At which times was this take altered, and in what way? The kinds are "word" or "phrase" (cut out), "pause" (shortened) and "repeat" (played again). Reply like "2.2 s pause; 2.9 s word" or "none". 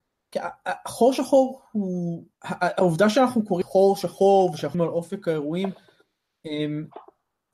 2.3 s pause; 3.6 s word; 4.7 s word